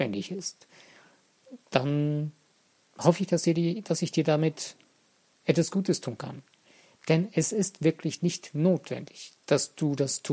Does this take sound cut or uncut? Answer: uncut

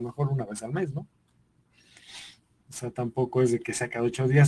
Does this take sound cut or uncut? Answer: uncut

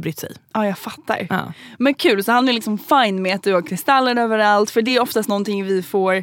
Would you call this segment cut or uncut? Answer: uncut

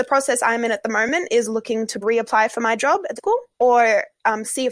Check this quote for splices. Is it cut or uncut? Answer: cut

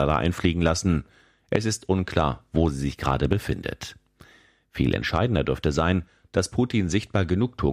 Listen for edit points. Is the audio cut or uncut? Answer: uncut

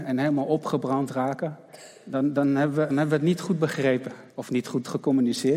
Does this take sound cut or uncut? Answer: cut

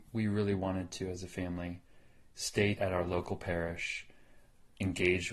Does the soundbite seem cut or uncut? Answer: cut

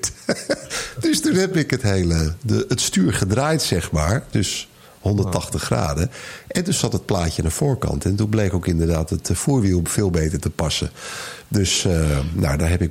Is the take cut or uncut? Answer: uncut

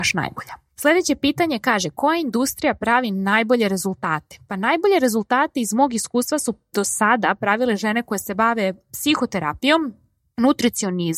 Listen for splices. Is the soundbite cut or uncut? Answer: uncut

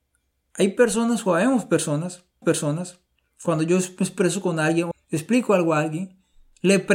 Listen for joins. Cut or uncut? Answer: cut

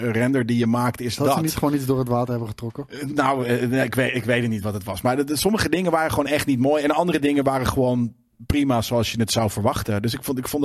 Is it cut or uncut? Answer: uncut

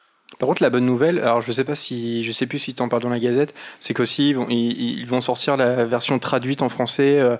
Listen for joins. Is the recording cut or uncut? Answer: uncut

